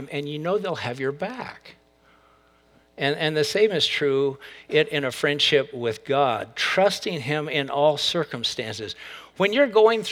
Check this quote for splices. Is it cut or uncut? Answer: uncut